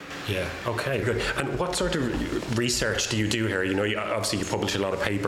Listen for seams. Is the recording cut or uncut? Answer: cut